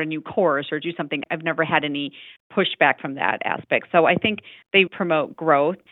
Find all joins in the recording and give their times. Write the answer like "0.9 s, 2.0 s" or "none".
4.9 s